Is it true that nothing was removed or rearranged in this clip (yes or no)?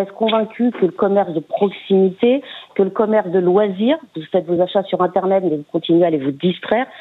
yes